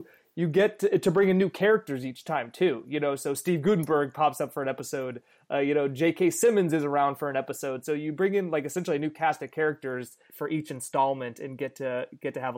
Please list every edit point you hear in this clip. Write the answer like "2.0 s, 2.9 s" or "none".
none